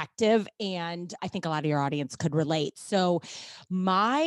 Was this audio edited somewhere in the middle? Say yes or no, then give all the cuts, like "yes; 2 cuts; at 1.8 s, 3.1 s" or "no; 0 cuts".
yes; 1 cut; at 1.2 s